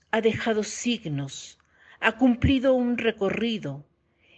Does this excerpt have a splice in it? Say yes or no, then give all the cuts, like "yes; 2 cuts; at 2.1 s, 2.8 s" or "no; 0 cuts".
no; 0 cuts